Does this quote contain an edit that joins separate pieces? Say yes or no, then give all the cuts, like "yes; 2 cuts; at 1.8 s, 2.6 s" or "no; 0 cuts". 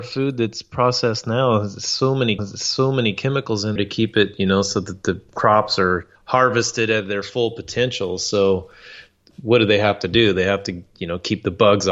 yes; 3 cuts; at 2.4 s, 3.8 s, 6.2 s